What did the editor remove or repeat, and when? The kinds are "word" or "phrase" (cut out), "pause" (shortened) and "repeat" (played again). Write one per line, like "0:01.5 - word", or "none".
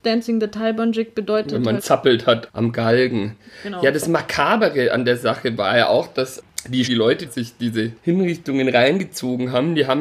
0:01.8 - word
0:06.8 - word
0:07.3 - phrase
0:08.0 - pause